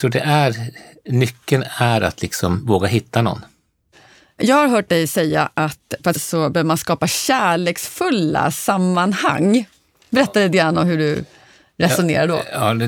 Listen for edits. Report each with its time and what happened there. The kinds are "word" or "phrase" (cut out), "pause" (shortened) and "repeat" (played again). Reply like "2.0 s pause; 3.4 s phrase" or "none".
6.1 s phrase